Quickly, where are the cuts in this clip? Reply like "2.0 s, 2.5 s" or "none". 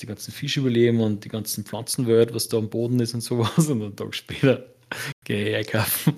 none